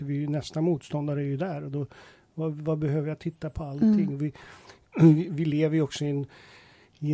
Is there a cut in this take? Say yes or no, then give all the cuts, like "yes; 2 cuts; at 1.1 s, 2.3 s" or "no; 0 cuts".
no; 0 cuts